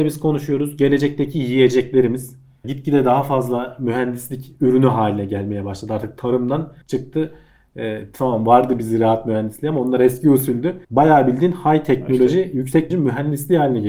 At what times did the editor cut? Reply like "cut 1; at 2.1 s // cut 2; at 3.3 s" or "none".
cut 1; at 2.6 s // cut 2; at 6.8 s // cut 3; at 10.8 s // cut 4; at 12.9 s